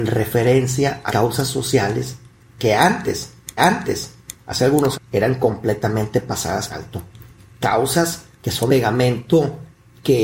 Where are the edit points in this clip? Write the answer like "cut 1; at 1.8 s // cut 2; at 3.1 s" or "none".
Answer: cut 1; at 1.1 s // cut 2; at 3.6 s // cut 3; at 4.9 s // cut 4; at 6.7 s // cut 5; at 8.3 s // cut 6; at 8.7 s